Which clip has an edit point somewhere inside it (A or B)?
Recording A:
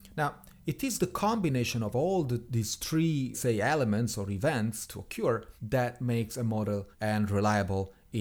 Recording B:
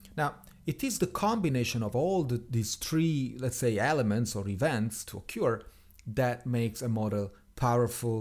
A